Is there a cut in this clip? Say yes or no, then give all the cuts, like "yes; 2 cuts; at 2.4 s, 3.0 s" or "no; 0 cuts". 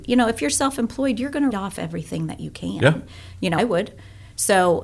yes; 2 cuts; at 1.5 s, 3.6 s